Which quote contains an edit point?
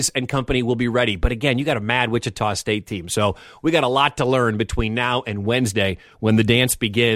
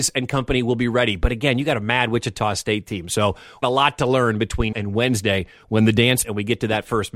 second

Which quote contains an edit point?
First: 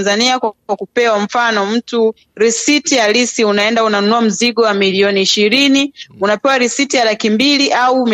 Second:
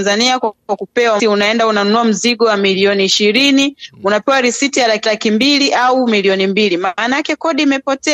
second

